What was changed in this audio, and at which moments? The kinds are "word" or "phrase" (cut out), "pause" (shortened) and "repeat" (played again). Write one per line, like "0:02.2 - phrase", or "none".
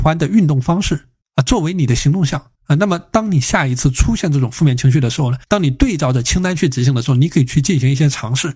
0:01.2 - pause
0:02.6 - pause
0:05.4 - pause